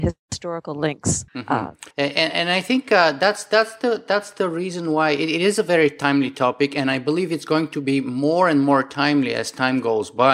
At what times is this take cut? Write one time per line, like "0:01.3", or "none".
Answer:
0:01.3
0:01.9

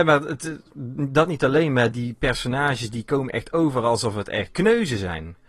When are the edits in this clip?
0:01.9
0:04.5

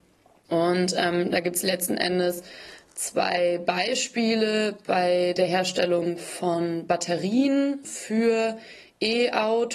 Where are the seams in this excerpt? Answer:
none

